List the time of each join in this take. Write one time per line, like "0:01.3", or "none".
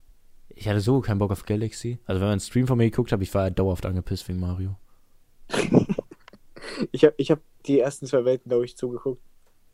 none